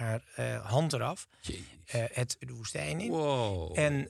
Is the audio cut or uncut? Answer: cut